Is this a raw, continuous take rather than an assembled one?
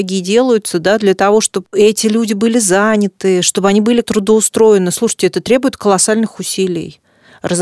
no; 1 cut; at 4.0 s

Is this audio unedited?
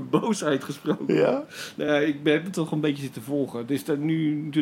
yes; 0 cuts

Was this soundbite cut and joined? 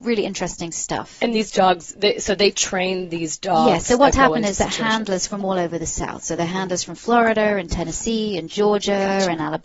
no; 0 cuts

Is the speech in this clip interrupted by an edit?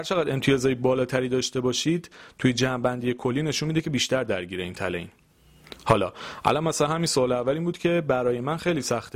no; 0 cuts

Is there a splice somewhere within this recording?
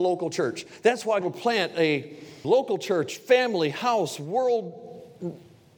yes; 2 cuts; at 1.2 s, 2.4 s

